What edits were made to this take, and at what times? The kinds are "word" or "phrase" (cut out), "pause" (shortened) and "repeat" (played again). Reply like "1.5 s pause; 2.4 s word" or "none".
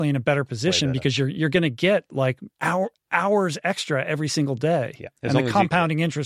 2.5 s pause; 5.2 s pause